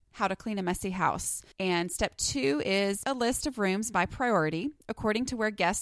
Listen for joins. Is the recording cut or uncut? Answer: cut